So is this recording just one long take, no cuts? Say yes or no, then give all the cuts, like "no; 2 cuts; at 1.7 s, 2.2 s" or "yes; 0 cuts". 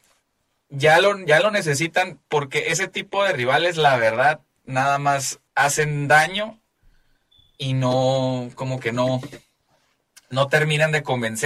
no; 1 cut; at 5.5 s